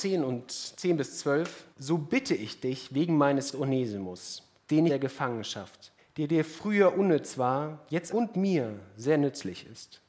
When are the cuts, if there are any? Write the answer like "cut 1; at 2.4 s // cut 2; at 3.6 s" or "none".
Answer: cut 1; at 1.7 s // cut 2; at 3.5 s // cut 3; at 4.9 s // cut 4; at 6.0 s // cut 5; at 8.1 s